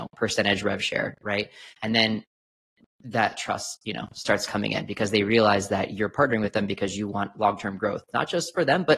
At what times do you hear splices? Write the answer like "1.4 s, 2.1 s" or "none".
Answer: none